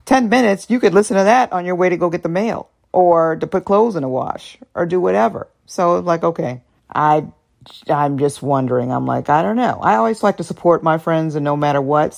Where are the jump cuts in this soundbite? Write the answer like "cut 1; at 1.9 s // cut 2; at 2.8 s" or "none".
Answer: cut 1; at 2.8 s // cut 2; at 6.8 s